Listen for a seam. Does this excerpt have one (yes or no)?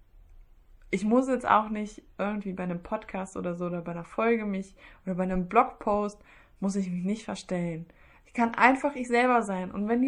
no